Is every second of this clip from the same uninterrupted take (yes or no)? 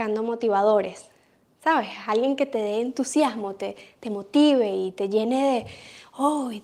yes